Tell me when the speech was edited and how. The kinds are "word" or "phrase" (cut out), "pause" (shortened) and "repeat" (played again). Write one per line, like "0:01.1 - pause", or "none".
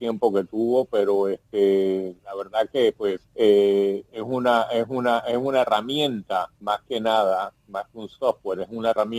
0:02.2 - pause
0:03.3 - pause
0:06.5 - pause